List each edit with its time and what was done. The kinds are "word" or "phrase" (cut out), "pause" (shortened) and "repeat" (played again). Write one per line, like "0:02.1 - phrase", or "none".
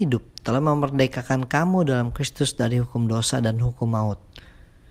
none

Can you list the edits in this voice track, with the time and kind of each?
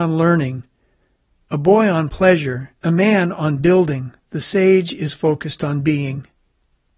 0:02.8 - pause
0:04.2 - pause

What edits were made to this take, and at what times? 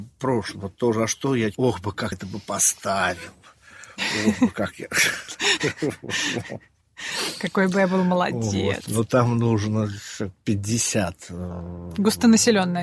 0:02.1 - word

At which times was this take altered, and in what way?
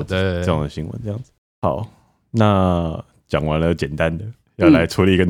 none

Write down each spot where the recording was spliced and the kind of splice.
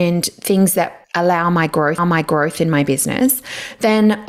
0:01.0 - pause
0:02.0 - repeat

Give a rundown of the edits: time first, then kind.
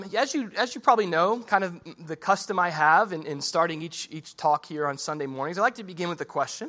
none

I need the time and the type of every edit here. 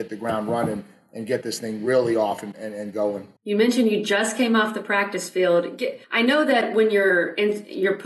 0:03.4 - pause
0:06.0 - pause

